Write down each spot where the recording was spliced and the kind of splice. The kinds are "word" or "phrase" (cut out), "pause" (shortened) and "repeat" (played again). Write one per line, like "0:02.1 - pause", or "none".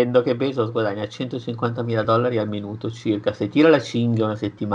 none